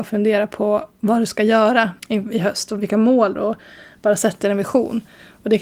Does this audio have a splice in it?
yes; 3 cuts; at 2.0 s, 2.8 s, 3.3 s

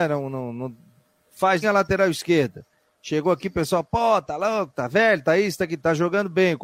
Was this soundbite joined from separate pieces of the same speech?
yes; 1 cut; at 1.6 s

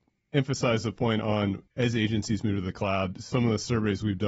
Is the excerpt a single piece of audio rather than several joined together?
no; 1 cut; at 1.7 s

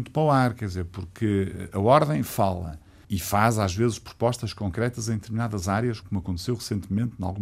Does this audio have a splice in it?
yes; 1 cut; at 6.0 s

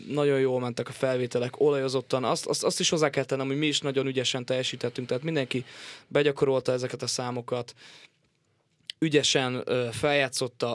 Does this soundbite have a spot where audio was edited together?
no; 0 cuts

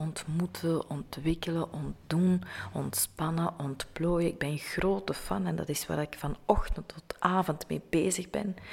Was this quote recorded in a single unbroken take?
yes; 0 cuts

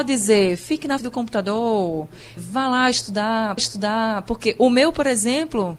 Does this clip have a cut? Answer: yes; 3 cuts; at 1.0 s, 2.4 s, 3.6 s

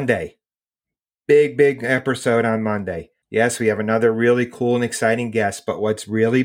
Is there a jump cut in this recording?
yes; 1 cut; at 3.2 s

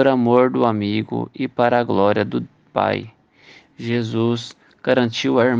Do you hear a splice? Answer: no; 0 cuts

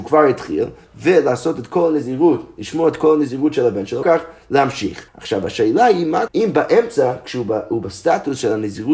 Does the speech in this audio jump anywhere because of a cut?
yes; 3 cuts; at 4.0 s, 5.1 s, 6.3 s

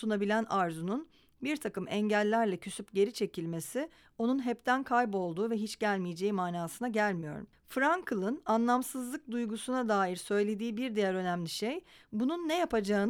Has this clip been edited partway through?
no; 0 cuts

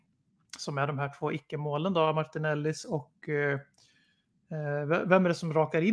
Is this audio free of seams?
yes; 0 cuts

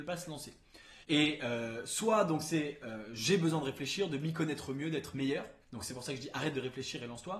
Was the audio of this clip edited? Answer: yes; 2 cuts; at 1.0 s, 5.6 s

